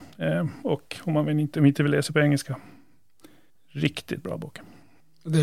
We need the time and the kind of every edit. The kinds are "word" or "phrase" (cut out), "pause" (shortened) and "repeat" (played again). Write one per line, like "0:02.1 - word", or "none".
none